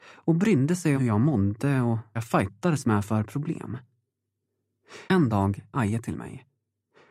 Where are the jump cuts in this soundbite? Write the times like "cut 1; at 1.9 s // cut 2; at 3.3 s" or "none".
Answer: cut 1; at 1.0 s // cut 2; at 2.2 s // cut 3; at 5.1 s // cut 4; at 5.7 s